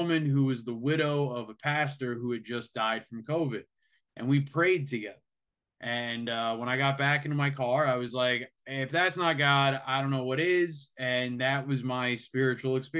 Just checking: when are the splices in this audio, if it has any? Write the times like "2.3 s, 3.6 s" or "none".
none